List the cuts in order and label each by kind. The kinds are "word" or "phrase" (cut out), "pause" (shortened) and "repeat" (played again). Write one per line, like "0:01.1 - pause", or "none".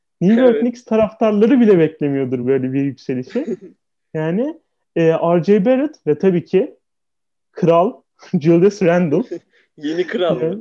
none